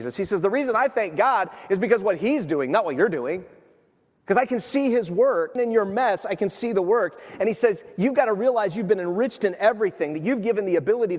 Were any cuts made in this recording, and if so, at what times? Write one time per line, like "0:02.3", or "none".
0:05.6